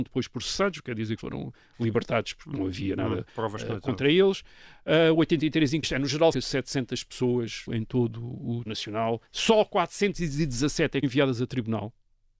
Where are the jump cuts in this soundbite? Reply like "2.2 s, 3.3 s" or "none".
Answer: 1.2 s, 3.3 s, 5.8 s, 6.3 s, 7.7 s, 8.7 s, 9.3 s, 11.0 s